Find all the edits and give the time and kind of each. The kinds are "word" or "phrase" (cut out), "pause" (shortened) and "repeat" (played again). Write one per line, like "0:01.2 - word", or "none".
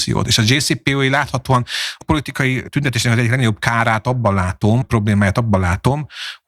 0:02.0 - word
0:04.8 - word

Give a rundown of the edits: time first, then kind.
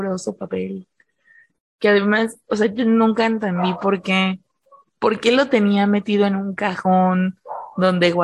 none

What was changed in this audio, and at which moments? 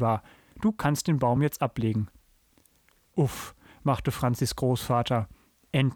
none

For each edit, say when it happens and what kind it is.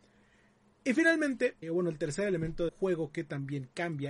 0:01.6 - word
0:02.7 - word

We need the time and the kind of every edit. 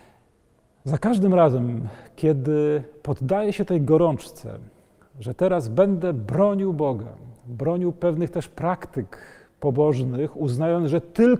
none

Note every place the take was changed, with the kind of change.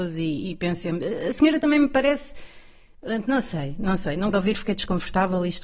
0:04.3 - word

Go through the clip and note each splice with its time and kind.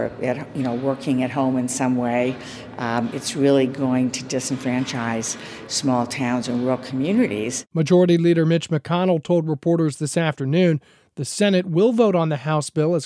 none

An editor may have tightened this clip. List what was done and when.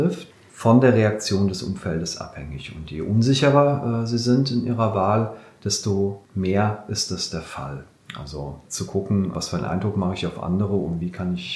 none

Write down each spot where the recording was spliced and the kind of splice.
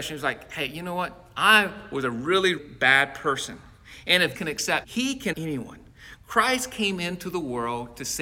0:02.6 - word
0:04.3 - word
0:04.8 - word
0:05.3 - word

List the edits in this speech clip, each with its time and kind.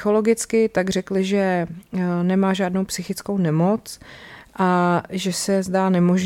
none

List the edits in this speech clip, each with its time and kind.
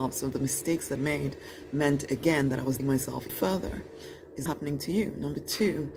0:01.0 - word
0:02.8 - word
0:03.3 - word
0:04.5 - word

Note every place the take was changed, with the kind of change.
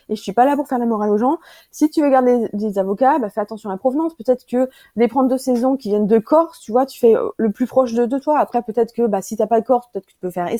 none

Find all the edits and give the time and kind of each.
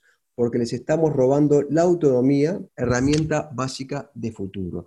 0:02.7 - pause

